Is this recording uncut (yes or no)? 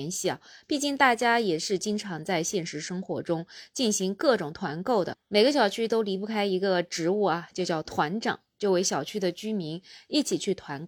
yes